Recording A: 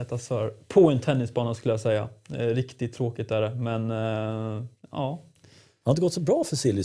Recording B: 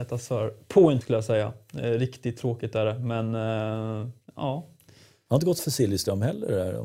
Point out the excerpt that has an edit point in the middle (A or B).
B